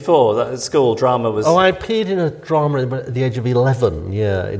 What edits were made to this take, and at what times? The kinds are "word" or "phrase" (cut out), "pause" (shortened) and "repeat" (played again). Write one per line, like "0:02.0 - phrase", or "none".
none